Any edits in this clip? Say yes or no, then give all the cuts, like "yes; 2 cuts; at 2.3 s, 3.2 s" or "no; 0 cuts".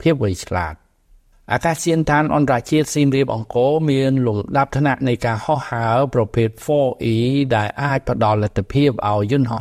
no; 0 cuts